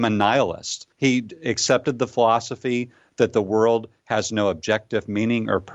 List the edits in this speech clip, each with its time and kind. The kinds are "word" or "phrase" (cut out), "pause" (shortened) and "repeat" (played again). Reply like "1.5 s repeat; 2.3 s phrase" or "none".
0.9 s pause